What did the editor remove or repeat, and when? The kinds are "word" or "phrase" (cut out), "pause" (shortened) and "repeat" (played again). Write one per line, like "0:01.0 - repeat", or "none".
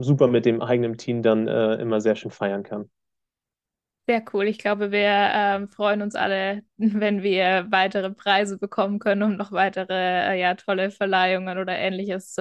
none